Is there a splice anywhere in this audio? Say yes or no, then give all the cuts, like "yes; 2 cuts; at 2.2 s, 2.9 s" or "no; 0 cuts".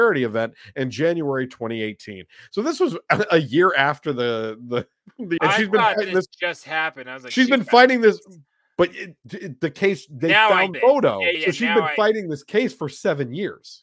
yes; 3 cuts; at 5.4 s, 10.7 s, 11.3 s